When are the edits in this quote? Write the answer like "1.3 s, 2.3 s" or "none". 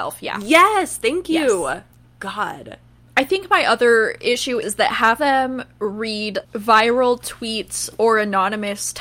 3.0 s, 4.6 s, 5.2 s, 6.4 s